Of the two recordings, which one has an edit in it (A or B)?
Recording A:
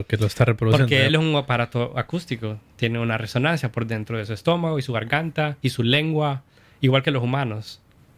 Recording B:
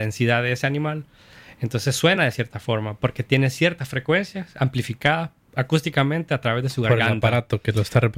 A